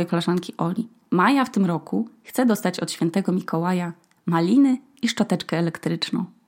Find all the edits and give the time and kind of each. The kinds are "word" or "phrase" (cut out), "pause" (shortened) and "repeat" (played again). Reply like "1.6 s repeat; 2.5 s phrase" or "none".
none